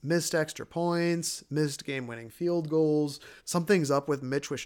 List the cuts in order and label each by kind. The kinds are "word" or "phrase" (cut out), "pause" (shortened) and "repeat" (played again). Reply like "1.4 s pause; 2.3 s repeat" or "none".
3.4 s pause